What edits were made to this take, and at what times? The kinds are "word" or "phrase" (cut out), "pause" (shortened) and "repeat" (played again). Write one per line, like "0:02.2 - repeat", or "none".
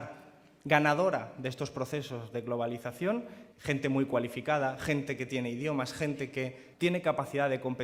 0:03.5 - pause
0:06.7 - pause